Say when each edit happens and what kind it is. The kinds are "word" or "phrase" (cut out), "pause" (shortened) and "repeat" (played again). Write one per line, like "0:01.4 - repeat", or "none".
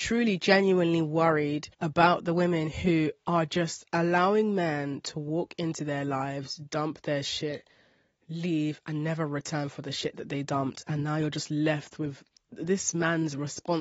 0:01.7 - pause

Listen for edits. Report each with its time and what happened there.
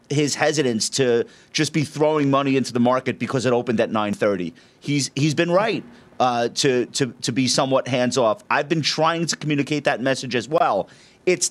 none

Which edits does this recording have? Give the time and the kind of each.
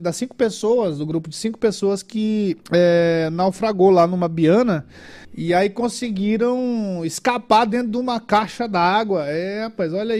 0:02.6 - pause
0:05.2 - pause

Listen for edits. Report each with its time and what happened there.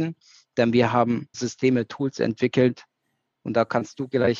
0:01.3 - word

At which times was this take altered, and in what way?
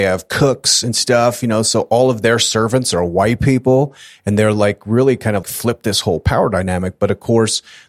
0:05.4 - word

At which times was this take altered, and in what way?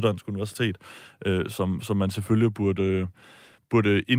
none

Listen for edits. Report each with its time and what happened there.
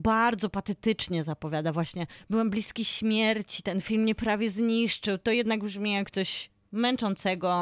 none

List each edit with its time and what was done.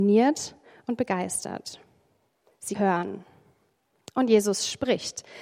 0:02.7 - phrase

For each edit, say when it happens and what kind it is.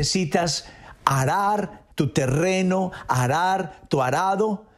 0:01.9 - pause

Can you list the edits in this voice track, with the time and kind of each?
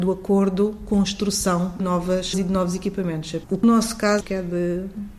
0:01.8 - word
0:02.3 - word
0:03.6 - word
0:04.2 - word

